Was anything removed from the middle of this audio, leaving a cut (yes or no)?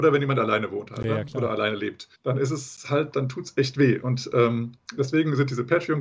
yes